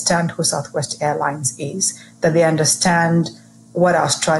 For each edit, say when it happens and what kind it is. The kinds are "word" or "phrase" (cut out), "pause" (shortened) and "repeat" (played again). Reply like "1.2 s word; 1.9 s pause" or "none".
none